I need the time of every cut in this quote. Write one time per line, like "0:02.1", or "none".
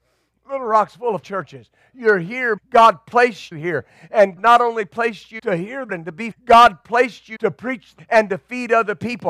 0:01.2
0:02.6
0:03.5
0:04.4
0:05.4
0:05.9
0:06.3
0:07.4
0:08.0